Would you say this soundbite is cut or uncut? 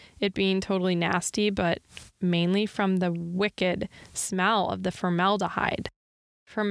uncut